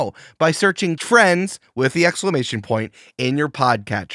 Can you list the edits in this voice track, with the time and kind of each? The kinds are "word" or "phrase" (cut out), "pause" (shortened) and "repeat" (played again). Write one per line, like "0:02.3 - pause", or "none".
0:01.0 - word